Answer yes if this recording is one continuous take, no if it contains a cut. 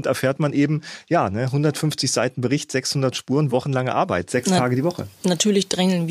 yes